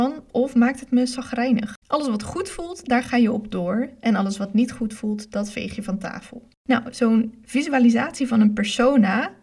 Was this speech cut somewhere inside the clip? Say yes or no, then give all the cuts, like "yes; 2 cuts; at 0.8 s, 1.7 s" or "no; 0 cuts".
yes; 2 cuts; at 1.8 s, 6.6 s